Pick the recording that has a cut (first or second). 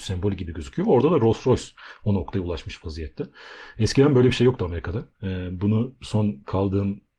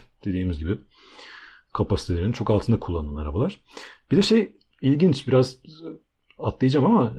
first